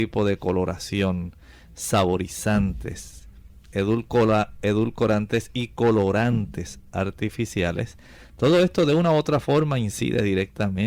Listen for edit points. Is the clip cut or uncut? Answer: uncut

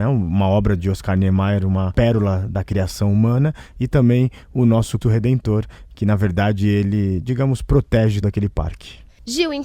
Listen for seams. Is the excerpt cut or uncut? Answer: cut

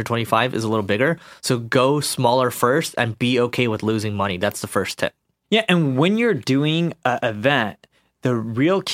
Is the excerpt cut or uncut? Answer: uncut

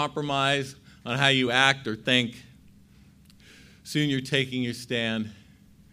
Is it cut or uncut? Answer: uncut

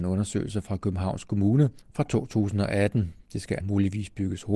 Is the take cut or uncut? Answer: cut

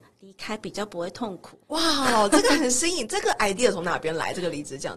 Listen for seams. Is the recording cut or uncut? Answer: cut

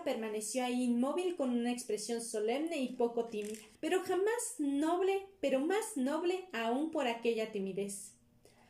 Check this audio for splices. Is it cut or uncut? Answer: cut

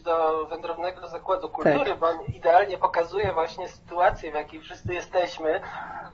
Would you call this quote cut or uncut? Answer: uncut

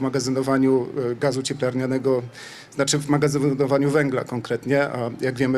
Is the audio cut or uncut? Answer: uncut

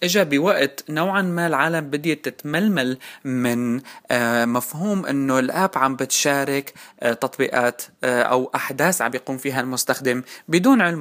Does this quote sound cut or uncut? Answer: uncut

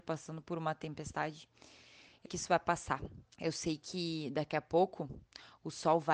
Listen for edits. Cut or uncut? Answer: cut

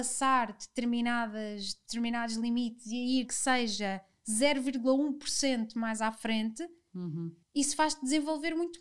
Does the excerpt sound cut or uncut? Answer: cut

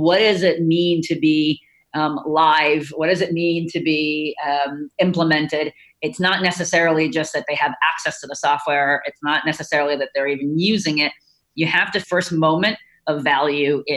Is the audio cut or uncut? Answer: cut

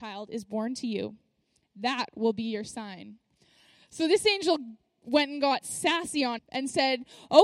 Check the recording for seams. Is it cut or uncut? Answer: cut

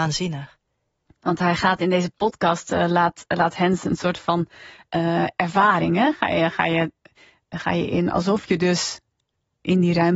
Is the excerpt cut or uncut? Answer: uncut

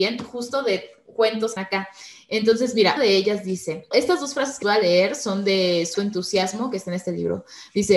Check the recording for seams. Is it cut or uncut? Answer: cut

